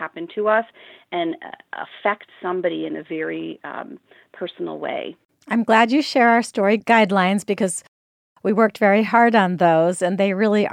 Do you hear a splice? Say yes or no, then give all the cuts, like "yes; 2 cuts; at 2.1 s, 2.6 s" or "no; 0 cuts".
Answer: no; 0 cuts